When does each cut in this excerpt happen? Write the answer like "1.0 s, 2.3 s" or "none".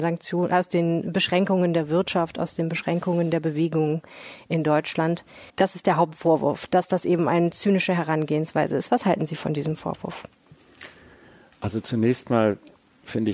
5.5 s